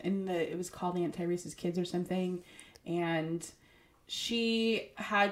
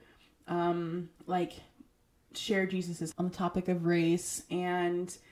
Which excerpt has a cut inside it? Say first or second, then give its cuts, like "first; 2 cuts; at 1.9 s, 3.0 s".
second; 2 cuts; at 1.2 s, 3.1 s